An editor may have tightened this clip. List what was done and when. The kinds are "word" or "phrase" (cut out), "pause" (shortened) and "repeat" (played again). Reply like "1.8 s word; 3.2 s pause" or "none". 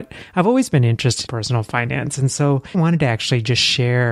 1.3 s word; 2.7 s phrase